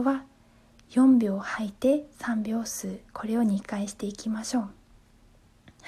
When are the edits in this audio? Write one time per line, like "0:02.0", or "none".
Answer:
0:02.1
0:03.1